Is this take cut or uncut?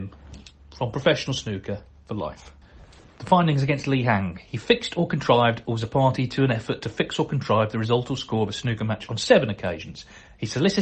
uncut